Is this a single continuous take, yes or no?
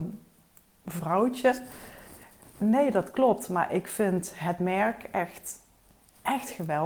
yes